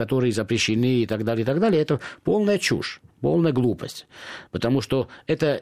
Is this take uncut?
yes; 0 cuts

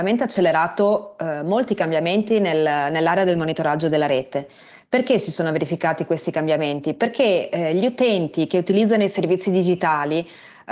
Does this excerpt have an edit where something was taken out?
no; 0 cuts

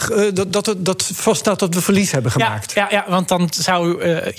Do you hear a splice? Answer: no; 0 cuts

